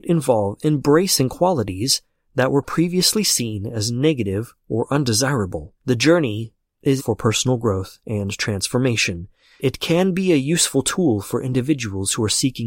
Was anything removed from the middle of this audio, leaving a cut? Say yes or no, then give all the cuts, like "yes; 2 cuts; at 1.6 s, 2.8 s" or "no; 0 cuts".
yes; 3 cuts; at 5.8 s, 7.0 s, 9.6 s